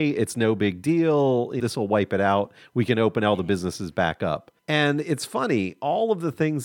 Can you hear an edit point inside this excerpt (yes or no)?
yes